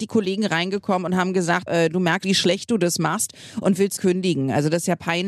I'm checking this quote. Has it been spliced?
yes; 3 cuts; at 1.7 s, 2.2 s, 4.0 s

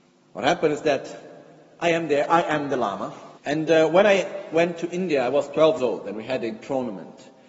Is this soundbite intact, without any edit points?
no; 2 cuts; at 3.4 s, 5.8 s

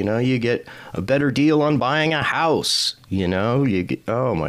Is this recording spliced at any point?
no; 0 cuts

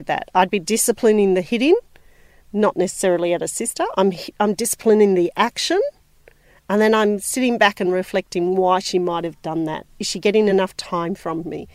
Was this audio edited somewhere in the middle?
no; 0 cuts

